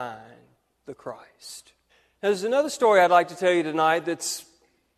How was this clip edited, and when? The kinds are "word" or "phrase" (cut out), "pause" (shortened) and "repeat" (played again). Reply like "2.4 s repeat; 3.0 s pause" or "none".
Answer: 1.9 s pause